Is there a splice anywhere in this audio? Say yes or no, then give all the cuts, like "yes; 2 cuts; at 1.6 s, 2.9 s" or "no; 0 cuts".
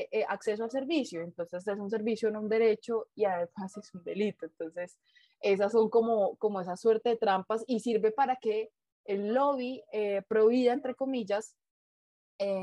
no; 0 cuts